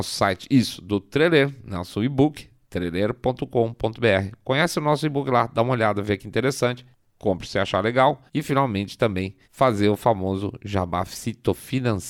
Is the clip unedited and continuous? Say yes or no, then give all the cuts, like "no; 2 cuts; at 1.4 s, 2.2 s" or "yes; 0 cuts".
no; 3 cuts; at 6.9 s, 8.3 s, 9.4 s